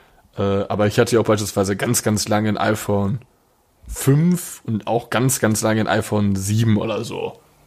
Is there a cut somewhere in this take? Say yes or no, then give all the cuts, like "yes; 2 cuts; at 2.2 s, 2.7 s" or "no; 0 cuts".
no; 0 cuts